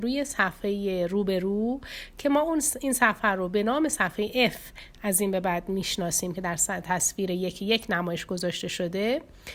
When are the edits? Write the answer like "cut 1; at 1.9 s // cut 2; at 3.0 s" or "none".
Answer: none